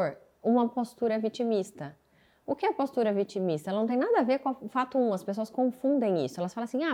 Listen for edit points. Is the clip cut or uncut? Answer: uncut